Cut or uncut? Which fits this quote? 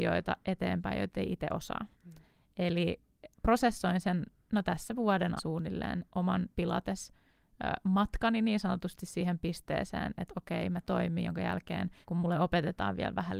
cut